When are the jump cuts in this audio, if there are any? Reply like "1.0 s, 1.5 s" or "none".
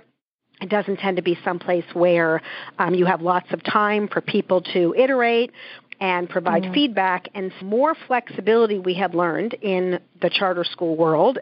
7.6 s